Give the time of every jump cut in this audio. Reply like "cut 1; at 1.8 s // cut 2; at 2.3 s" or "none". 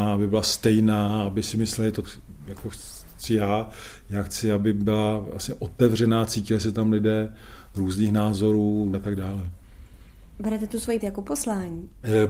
cut 1; at 2.0 s // cut 2; at 8.9 s // cut 3; at 11.0 s

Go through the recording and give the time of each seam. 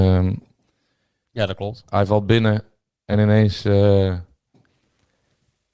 none

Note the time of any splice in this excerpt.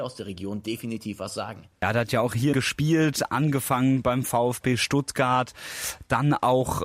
cut 1; at 2.5 s

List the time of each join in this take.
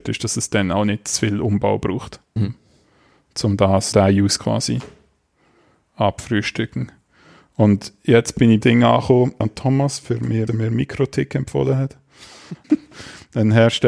cut 1; at 2.4 s // cut 2; at 3.9 s // cut 3; at 4.4 s // cut 4; at 8.6 s // cut 5; at 9.4 s // cut 6; at 10.5 s // cut 7; at 12.6 s

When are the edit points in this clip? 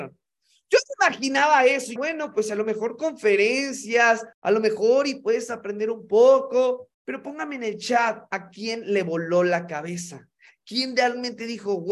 cut 1; at 2.0 s // cut 2; at 4.3 s // cut 3; at 6.9 s

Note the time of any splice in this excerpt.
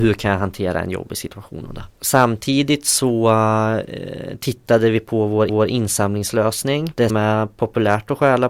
cut 1; at 5.5 s // cut 2; at 7.1 s

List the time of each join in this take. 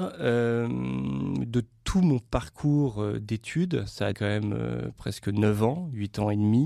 cut 1; at 4.1 s // cut 2; at 5.0 s

